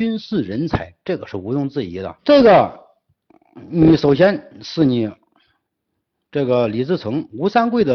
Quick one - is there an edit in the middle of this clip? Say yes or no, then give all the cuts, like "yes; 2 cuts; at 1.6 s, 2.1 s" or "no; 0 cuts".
yes; 1 cut; at 2.2 s